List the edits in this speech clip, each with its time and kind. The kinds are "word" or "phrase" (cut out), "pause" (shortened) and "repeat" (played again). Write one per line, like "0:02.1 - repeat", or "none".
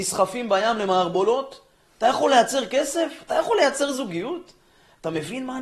none

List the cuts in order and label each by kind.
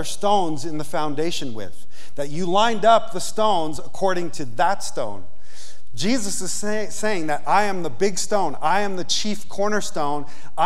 none

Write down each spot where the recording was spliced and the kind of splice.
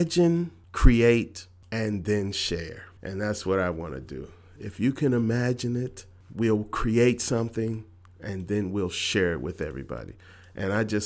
0:03.0 - pause

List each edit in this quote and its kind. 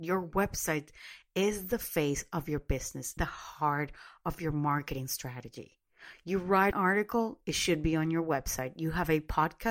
0:03.2 - word
0:06.7 - word

